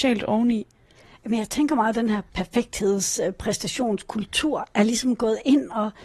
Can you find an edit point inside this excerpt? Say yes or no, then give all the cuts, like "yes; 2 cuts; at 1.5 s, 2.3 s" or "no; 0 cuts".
yes; 1 cut; at 2.3 s